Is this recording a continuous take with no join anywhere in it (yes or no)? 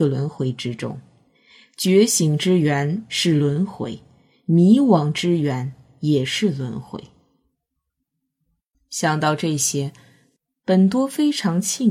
yes